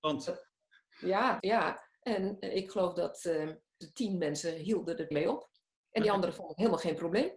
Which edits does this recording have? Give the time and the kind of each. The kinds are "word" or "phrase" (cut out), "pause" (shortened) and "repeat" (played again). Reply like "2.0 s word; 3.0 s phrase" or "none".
1.4 s word; 3.8 s word; 5.1 s word